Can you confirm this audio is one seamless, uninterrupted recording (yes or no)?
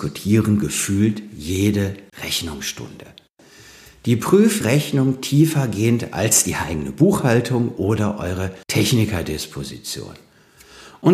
no